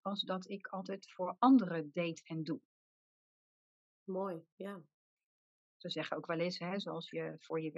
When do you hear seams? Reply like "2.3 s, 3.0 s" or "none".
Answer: none

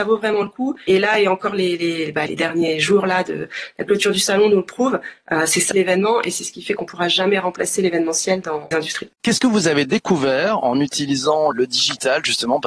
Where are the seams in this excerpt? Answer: 2.3 s, 5.7 s, 8.7 s, 11.5 s

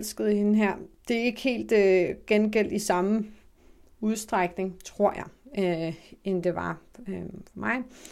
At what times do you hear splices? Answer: none

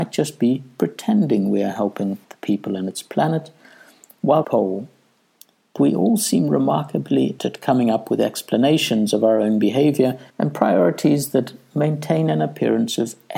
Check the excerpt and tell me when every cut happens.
2.2 s, 4.4 s, 5.8 s, 7.4 s, 10.3 s

